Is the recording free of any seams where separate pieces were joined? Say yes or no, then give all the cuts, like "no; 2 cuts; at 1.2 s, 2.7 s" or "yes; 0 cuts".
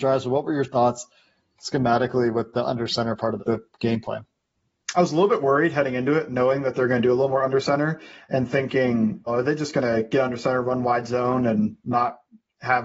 no; 2 cuts; at 3.4 s, 9.3 s